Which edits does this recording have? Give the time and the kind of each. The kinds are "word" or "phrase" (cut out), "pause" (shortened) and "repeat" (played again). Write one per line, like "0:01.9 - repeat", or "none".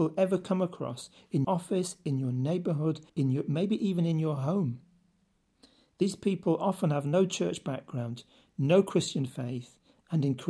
0:01.4 - word
0:03.1 - pause